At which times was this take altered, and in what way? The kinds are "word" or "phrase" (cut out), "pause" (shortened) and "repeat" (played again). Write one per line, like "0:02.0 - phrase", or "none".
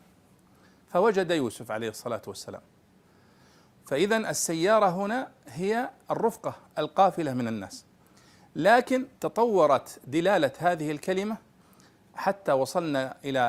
0:09.2 - pause